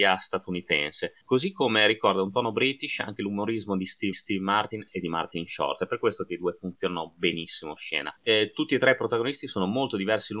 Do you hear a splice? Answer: yes; 4 cuts; at 1.2 s, 4.1 s, 7.8 s, 8.2 s

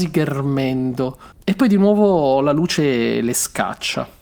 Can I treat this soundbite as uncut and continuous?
no; 1 cut; at 1.3 s

